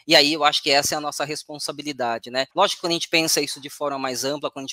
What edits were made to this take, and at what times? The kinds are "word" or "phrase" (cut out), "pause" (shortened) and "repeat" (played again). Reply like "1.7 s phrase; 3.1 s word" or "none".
2.5 s pause